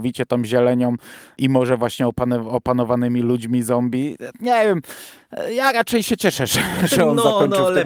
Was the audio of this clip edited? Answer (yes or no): no